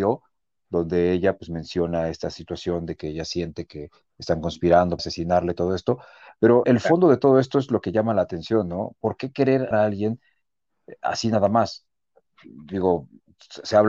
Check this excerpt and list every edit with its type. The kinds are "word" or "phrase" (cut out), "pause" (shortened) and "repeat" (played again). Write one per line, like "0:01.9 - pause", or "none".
0:05.0 - word
0:06.6 - word
0:09.7 - word